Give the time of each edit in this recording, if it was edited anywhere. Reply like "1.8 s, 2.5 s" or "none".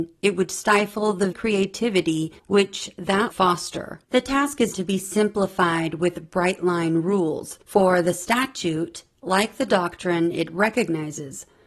1.3 s, 2.4 s, 3.3 s, 4.0 s, 4.7 s, 7.6 s